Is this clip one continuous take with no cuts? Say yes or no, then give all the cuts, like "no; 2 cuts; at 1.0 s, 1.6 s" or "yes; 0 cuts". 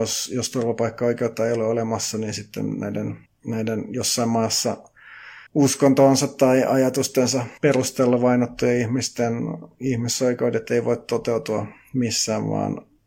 no; 3 cuts; at 3.3 s, 5.5 s, 7.6 s